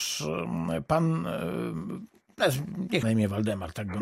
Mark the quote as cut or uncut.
cut